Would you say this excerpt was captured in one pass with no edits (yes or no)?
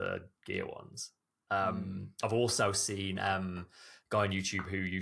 yes